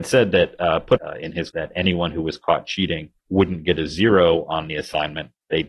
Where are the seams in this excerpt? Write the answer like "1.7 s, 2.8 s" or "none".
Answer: 1.0 s, 1.5 s, 3.2 s

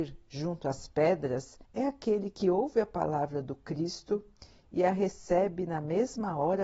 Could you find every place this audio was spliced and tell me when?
1.6 s

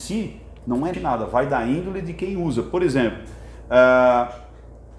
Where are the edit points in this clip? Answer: 0.9 s

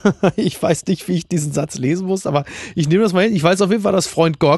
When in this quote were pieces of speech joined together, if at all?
none

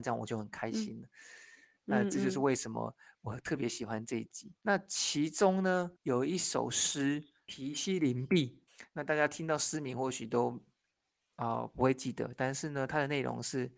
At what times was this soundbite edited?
4.6 s, 6.0 s, 8.7 s

